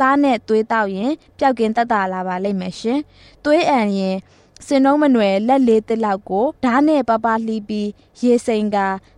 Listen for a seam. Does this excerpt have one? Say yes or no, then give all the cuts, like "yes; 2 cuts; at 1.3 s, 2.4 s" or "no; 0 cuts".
yes; 1 cut; at 6.6 s